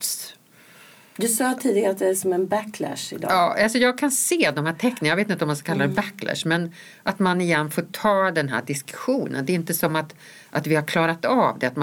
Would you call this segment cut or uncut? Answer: uncut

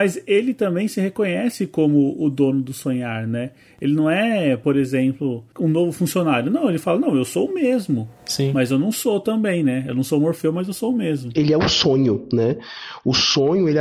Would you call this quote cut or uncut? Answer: uncut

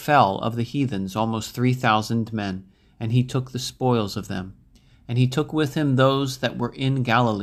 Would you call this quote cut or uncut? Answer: uncut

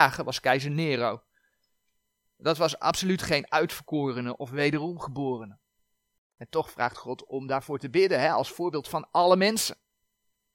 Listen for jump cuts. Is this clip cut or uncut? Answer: uncut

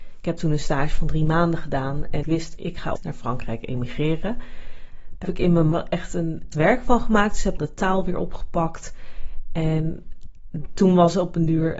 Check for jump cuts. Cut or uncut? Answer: cut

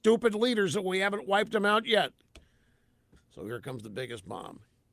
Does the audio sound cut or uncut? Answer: uncut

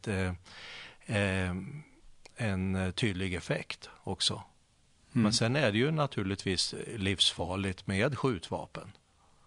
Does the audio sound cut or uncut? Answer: uncut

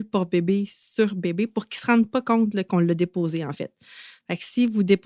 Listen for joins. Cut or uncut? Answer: uncut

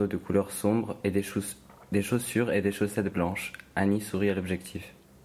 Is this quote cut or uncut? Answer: uncut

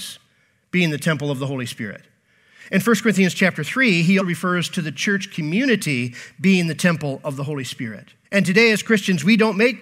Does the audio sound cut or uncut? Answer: cut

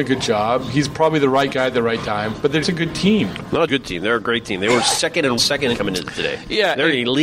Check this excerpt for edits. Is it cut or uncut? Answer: cut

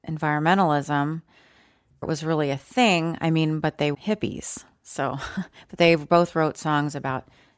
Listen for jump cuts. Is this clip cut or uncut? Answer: cut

